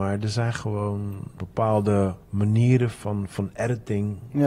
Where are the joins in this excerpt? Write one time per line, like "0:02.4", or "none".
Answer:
0:01.4
0:02.2